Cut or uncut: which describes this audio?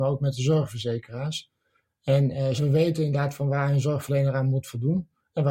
cut